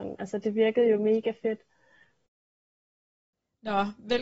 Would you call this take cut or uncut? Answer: uncut